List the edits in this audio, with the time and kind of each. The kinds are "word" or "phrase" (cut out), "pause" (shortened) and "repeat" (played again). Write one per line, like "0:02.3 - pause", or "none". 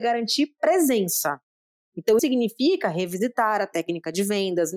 0:02.2 - word

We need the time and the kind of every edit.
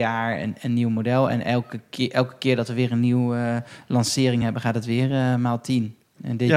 none

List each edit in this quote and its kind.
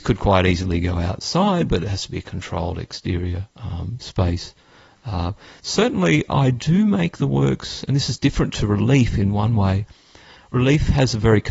none

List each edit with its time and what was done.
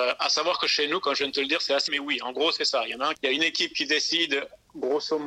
0:01.9 - word
0:03.1 - word

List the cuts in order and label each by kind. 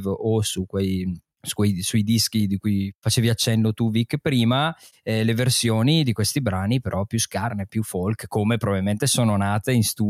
none

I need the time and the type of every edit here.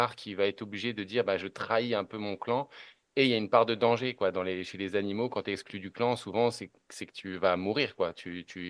none

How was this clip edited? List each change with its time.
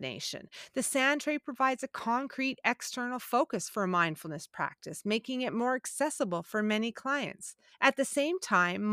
0:07.7 - pause

